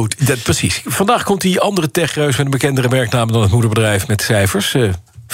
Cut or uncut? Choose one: uncut